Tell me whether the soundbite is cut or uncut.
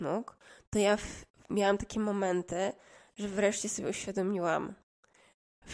uncut